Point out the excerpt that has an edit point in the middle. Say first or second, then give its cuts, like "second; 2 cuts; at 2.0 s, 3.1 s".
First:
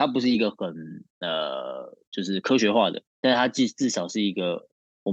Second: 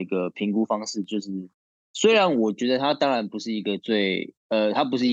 first; 1 cut; at 3.1 s